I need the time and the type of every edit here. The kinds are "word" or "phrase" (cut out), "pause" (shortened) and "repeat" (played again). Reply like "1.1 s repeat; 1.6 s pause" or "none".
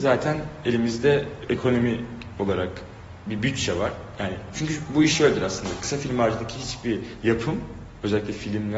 none